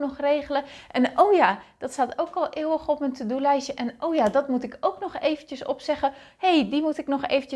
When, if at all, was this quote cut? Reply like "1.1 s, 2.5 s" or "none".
none